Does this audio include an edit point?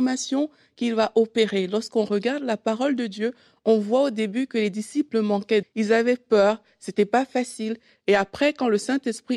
yes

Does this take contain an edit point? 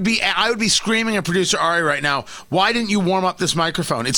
no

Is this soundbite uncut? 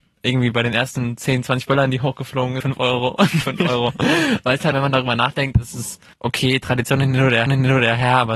no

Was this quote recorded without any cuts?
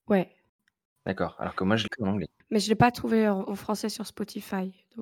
no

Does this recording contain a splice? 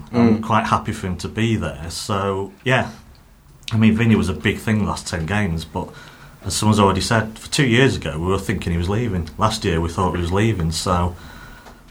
yes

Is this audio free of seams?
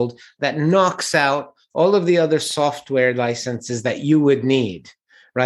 yes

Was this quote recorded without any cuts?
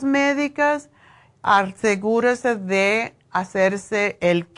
yes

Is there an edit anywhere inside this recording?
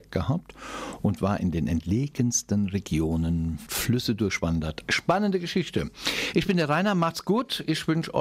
yes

